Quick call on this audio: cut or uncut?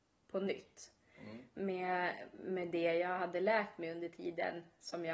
uncut